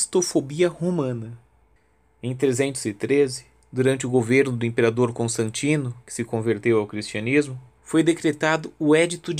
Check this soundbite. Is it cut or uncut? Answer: uncut